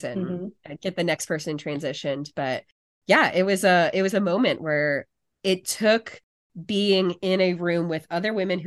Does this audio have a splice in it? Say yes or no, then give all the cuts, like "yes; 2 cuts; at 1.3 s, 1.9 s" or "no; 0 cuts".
no; 0 cuts